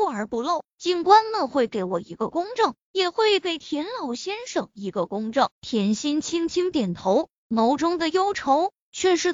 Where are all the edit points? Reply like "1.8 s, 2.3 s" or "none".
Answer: 5.5 s